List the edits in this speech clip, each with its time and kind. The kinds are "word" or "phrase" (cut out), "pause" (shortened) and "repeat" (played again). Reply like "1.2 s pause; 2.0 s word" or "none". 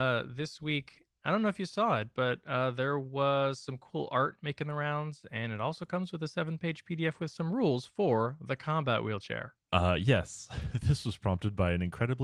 9.6 s pause